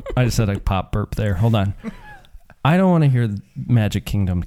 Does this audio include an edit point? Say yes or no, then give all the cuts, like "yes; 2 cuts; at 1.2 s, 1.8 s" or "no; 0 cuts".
no; 0 cuts